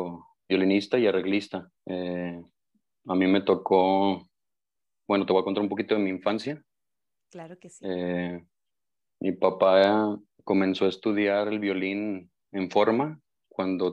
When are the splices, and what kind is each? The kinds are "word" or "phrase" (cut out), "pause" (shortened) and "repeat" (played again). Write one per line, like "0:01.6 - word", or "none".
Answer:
0:01.8 - pause

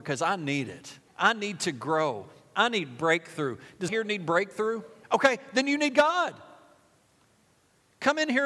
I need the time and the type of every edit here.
0:01.1 - pause
0:03.9 - word
0:05.0 - pause

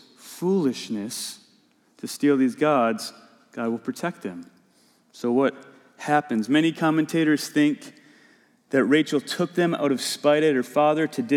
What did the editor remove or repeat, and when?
none

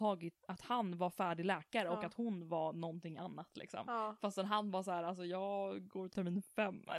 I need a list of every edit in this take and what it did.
none

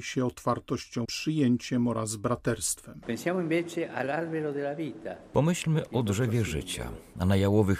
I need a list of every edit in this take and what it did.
0:01.0 - phrase

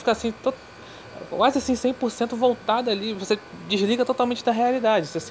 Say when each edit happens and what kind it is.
none

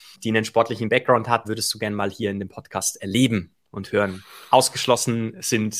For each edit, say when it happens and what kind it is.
0:01.4 - word

